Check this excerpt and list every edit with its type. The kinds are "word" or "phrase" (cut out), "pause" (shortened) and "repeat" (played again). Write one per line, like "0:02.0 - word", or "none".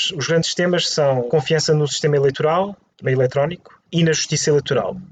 0:01.3 - word
0:03.0 - word